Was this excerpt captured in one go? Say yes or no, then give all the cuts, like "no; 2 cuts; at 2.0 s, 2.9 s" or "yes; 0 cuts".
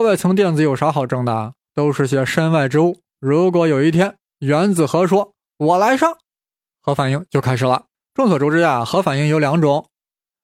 no; 3 cuts; at 1.7 s, 3.1 s, 7.9 s